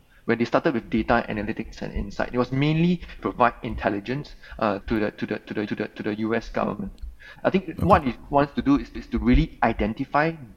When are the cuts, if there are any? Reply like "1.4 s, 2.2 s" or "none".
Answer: 3.2 s, 4.8 s, 5.7 s, 9.0 s